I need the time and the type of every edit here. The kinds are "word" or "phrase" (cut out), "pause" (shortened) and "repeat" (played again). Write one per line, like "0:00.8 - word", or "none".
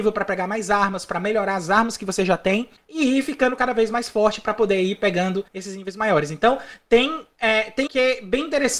0:05.5 - pause
0:07.9 - word